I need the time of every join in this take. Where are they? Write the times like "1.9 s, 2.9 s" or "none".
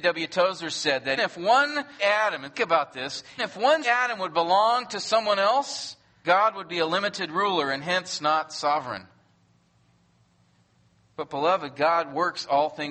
1.2 s, 2.0 s, 2.5 s, 3.4 s, 3.8 s, 6.2 s